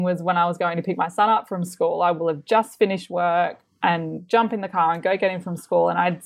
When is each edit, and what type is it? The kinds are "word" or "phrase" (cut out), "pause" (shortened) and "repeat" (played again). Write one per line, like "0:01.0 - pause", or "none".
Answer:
none